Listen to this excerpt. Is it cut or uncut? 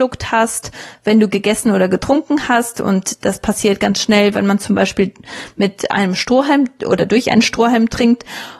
uncut